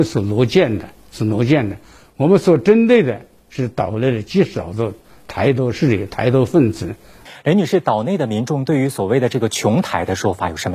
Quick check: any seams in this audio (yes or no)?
no